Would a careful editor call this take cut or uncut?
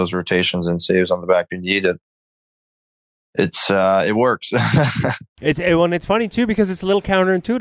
cut